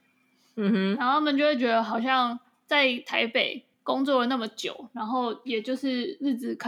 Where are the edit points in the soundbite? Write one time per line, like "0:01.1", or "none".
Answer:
0:03.7